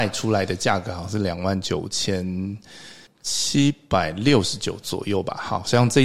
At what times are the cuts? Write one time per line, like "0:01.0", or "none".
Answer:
0:03.1

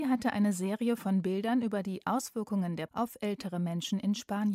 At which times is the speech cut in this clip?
0:02.9

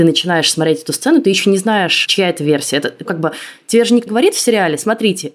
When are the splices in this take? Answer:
0:03.1
0:04.1

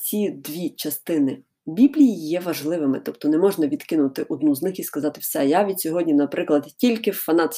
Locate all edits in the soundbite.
none

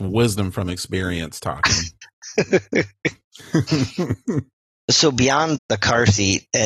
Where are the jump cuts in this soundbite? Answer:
0:05.6

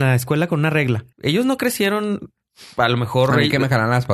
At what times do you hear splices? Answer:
0:01.1

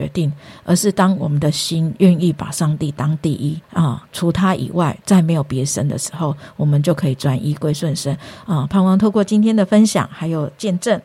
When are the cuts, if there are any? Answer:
0:03.6

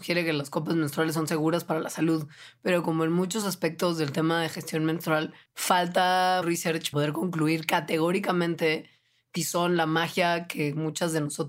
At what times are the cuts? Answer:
0:03.4
0:06.4
0:06.9
0:09.4

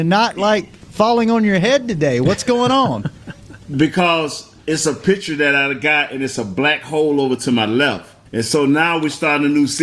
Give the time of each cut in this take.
0:04.6
0:08.3

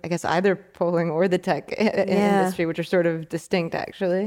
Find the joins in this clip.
none

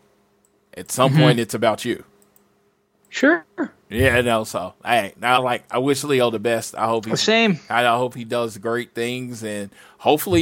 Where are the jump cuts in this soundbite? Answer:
0:05.4

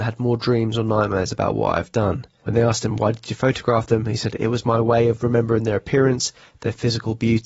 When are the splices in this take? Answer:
none

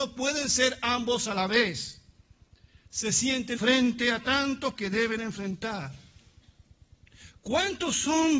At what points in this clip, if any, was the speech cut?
0:03.6
0:04.8

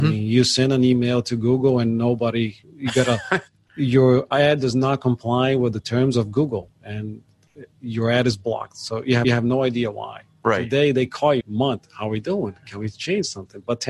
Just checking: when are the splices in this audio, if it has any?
0:02.6
0:03.5
0:09.2
0:11.4

